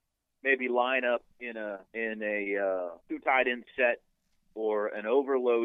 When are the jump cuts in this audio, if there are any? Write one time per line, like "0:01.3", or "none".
0:01.9
0:03.0

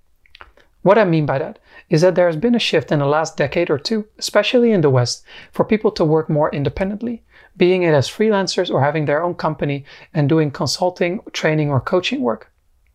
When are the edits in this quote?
none

